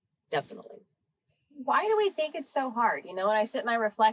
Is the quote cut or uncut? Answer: uncut